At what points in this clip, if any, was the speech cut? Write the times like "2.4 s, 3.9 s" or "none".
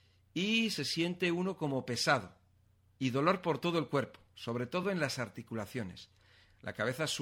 none